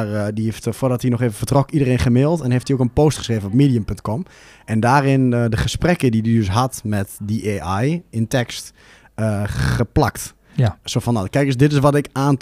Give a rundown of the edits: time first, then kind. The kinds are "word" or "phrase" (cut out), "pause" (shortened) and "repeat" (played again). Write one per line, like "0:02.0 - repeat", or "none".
none